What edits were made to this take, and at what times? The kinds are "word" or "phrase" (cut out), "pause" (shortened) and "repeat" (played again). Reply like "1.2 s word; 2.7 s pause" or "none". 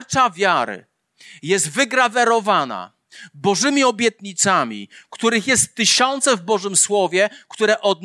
none